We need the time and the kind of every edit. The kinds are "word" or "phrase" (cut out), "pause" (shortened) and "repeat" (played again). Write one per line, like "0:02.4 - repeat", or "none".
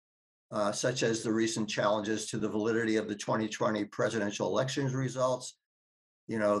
none